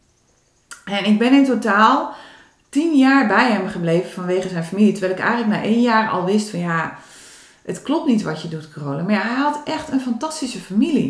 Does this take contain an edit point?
no; 0 cuts

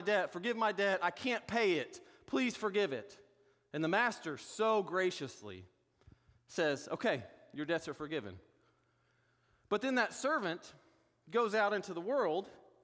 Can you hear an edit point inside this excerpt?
no; 0 cuts

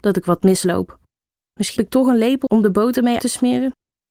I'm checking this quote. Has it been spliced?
yes; 3 cuts; at 1.8 s, 2.5 s, 3.2 s

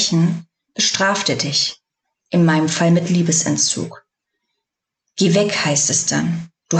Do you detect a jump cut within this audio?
no; 0 cuts

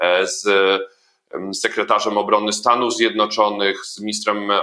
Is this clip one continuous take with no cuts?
yes; 0 cuts

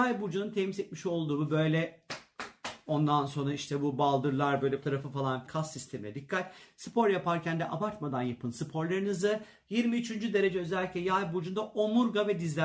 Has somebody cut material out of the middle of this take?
yes; 2 cuts; at 4.8 s, 5.5 s

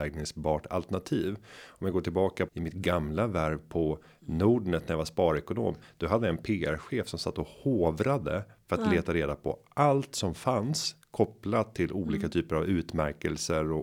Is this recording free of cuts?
no; 1 cut; at 2.5 s

